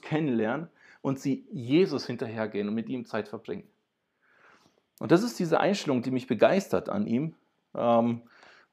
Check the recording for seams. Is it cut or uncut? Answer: uncut